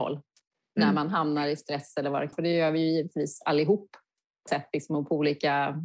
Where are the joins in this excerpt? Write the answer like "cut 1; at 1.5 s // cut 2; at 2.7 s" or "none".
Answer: cut 1; at 2.3 s // cut 2; at 4.5 s

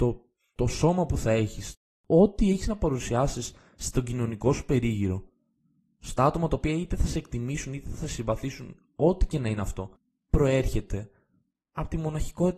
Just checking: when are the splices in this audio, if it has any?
none

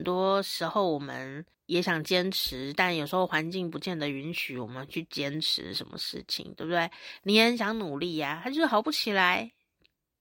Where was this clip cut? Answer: cut 1; at 1.5 s

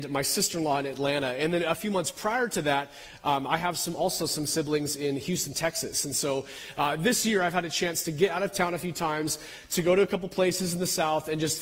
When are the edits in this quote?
none

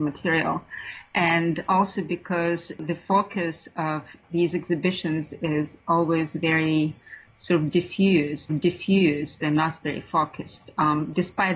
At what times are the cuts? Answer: cut 1; at 8.5 s

